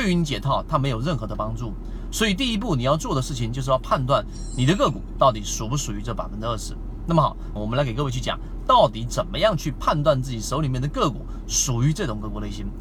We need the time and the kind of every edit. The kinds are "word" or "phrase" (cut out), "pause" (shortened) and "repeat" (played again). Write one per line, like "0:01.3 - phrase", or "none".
0:07.6 - phrase